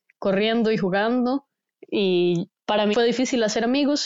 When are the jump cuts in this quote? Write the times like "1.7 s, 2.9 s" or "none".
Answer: 2.6 s, 2.9 s

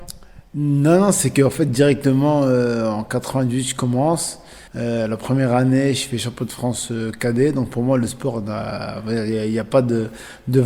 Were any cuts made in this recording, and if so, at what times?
4.7 s

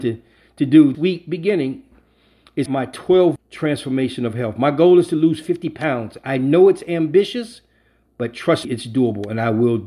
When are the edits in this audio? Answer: 0.9 s, 2.7 s, 3.4 s, 8.6 s

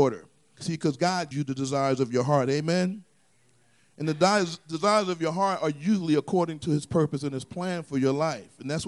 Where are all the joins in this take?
1.3 s

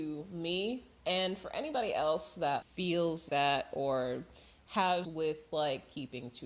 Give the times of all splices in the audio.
2.6 s, 3.3 s, 5.0 s

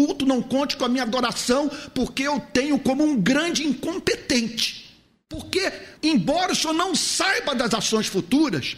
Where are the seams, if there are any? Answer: 6.0 s

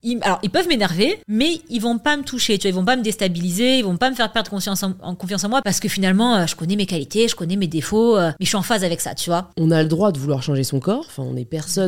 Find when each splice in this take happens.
1.2 s

